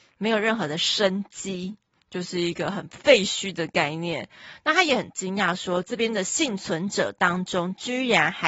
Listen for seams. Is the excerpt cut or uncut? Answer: uncut